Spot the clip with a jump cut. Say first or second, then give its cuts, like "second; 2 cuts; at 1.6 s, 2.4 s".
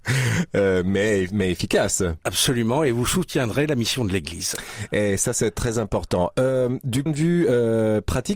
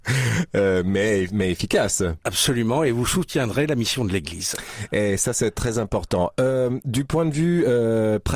first; 1 cut; at 7.1 s